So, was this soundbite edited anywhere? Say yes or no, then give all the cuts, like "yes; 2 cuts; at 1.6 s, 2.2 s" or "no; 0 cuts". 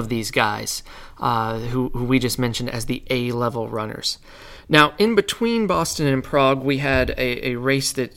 no; 0 cuts